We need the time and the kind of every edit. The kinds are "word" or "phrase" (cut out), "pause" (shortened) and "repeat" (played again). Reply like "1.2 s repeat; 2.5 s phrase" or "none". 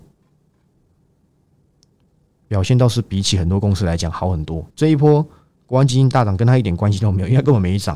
4.7 s pause